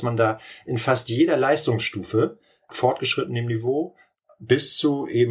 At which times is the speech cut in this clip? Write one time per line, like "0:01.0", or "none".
0:02.7